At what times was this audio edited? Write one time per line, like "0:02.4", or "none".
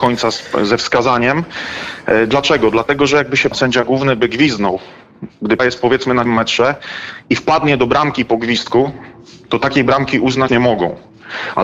0:03.5
0:05.6
0:06.3
0:10.5